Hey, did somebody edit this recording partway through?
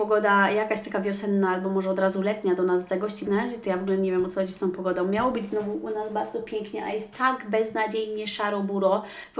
yes; 1 cut; at 3.2 s

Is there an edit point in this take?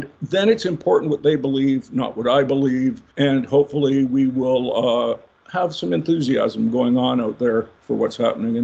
yes; 1 cut; at 3.1 s

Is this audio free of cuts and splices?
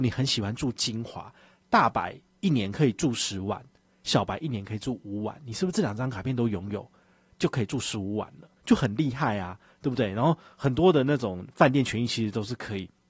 no; 1 cut; at 8.6 s

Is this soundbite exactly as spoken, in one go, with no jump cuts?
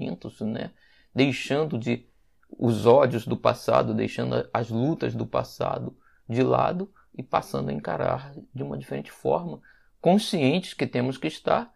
yes; 0 cuts

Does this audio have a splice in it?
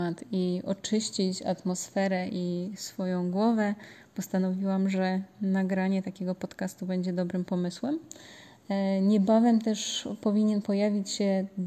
no; 0 cuts

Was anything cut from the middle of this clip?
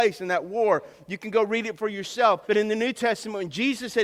yes; 1 cut; at 2.4 s

